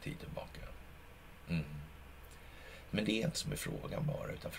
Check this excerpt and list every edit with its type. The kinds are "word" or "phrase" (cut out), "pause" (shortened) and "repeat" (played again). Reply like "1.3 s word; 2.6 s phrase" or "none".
3.3 s word